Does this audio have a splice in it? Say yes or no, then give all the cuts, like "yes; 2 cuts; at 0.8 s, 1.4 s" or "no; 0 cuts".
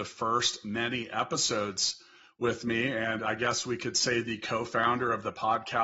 no; 0 cuts